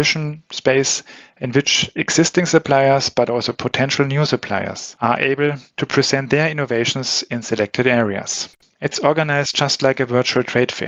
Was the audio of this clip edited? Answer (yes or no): no